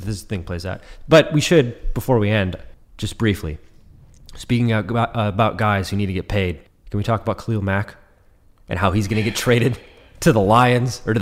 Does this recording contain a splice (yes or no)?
yes